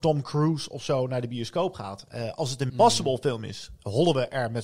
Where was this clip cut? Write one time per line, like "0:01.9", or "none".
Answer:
0:02.7